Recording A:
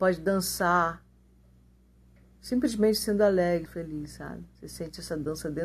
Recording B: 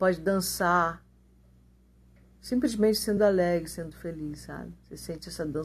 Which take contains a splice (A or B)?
A